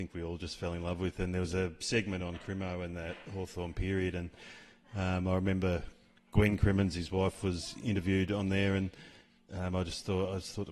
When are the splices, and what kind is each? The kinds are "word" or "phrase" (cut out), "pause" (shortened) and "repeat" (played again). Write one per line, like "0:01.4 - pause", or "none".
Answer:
none